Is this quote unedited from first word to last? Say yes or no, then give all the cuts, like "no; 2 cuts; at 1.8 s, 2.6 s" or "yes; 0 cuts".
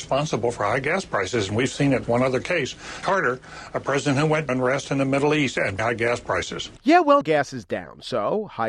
no; 6 cuts; at 2.0 s, 3.0 s, 4.5 s, 5.8 s, 6.8 s, 7.2 s